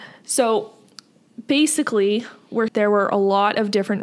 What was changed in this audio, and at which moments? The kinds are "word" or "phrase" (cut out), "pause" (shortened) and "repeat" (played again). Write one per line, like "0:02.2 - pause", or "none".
0:02.7 - phrase